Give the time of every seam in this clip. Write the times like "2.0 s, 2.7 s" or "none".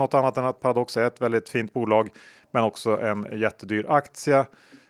none